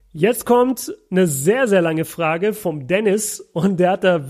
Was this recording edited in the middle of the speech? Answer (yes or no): no